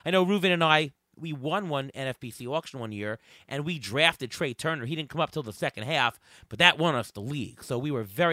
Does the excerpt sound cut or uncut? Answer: uncut